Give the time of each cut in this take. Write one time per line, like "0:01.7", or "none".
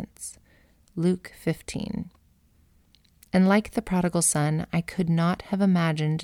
none